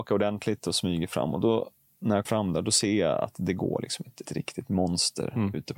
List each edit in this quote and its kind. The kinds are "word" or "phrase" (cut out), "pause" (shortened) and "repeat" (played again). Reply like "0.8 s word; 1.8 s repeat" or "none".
2.2 s word; 4.2 s word